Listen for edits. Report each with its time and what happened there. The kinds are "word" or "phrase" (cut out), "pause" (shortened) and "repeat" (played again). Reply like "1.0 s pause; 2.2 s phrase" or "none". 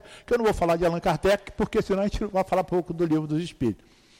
none

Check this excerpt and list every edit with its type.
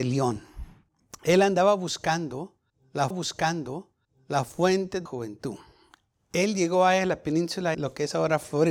3.1 s repeat; 5.1 s word; 7.7 s word

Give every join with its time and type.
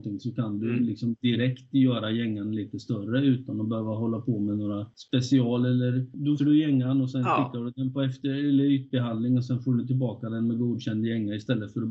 6.4 s word

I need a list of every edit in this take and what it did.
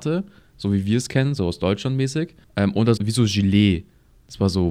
2.4 s pause; 3.0 s word

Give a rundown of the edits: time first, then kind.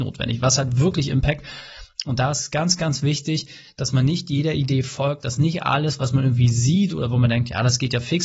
none

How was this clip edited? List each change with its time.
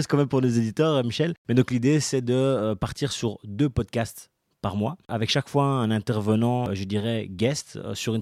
none

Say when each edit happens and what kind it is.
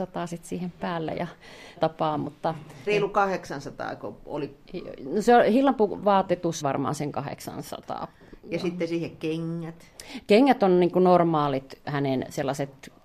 1.8 s word; 2.9 s word; 6.6 s word; 11.8 s word

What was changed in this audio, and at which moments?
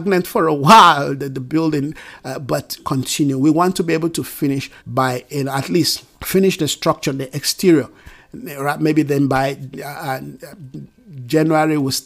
2.8 s phrase; 4.8 s pause; 6.1 s pause

